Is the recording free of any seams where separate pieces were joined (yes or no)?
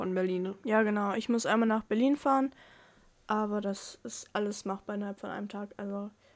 yes